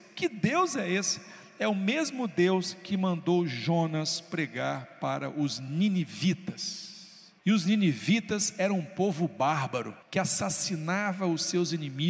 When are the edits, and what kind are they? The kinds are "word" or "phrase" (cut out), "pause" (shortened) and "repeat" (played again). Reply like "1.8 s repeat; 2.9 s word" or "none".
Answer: 7.4 s pause; 10.0 s pause